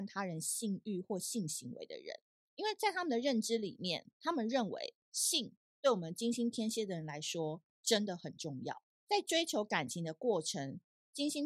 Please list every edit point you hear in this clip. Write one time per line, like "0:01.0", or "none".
0:02.3
0:05.0
0:08.9